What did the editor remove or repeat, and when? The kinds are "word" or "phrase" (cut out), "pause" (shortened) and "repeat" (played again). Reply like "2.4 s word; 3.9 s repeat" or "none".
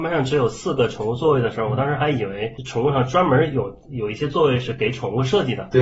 2.6 s word